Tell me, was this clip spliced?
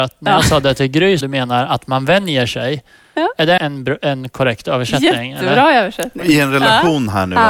yes; 2 cuts; at 1.2 s, 3.6 s

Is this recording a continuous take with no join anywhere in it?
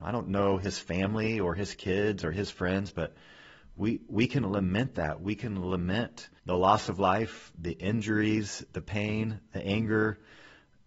no; 1 cut; at 6.4 s

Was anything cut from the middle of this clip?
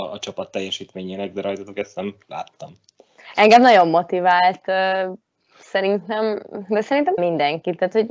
yes; 1 cut; at 7.2 s

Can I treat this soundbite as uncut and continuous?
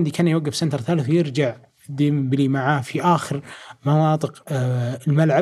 yes; 0 cuts

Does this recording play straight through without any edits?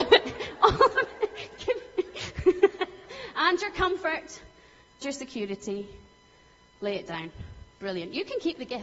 no; 1 cut; at 5.0 s

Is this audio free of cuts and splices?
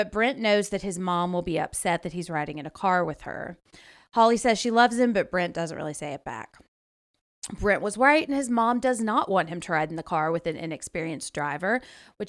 yes; 0 cuts

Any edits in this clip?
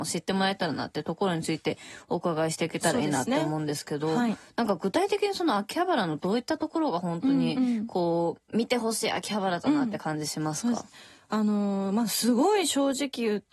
no; 0 cuts

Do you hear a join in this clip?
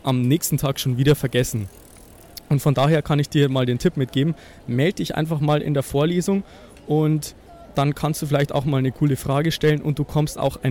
no; 0 cuts

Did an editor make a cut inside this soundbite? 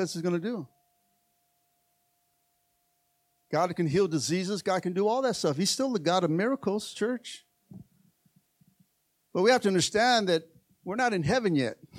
no; 0 cuts

